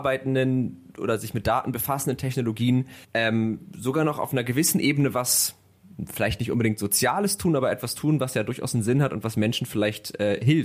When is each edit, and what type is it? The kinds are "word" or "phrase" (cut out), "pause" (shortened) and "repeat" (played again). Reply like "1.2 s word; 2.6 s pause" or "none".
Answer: 3.0 s pause